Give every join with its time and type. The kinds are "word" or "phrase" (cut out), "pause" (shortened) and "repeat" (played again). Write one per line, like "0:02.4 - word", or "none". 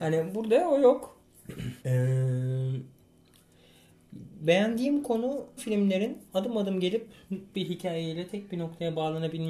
0:01.8 - pause
0:05.6 - word
0:06.3 - pause
0:07.5 - word